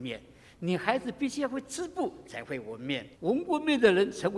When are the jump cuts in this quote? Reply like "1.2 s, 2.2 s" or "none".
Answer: 3.1 s